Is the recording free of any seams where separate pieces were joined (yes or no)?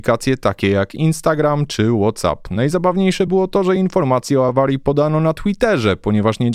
yes